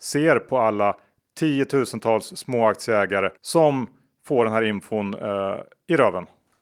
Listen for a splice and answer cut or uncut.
cut